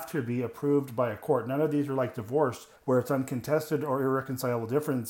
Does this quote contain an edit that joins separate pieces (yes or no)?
yes